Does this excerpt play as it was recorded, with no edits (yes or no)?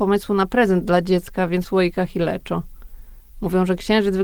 no